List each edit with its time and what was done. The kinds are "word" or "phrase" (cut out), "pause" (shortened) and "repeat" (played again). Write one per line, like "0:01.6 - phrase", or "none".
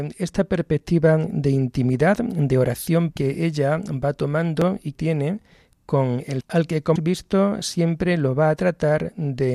0:03.1 - word
0:04.9 - word
0:06.4 - word
0:07.0 - word